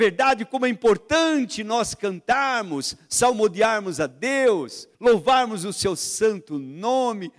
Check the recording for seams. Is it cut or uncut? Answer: cut